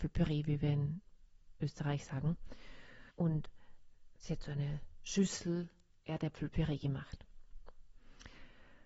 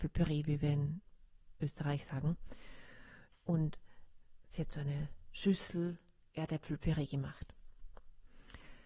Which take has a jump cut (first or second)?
first